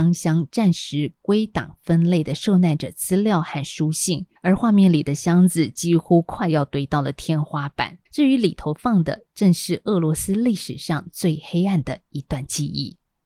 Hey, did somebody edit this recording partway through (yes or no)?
yes